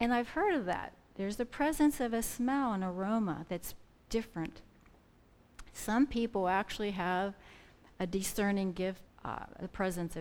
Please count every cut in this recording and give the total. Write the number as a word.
one